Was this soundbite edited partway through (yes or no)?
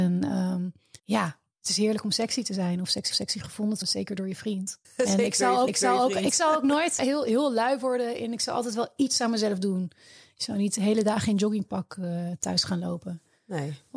yes